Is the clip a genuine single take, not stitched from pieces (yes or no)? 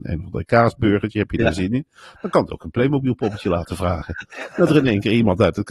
yes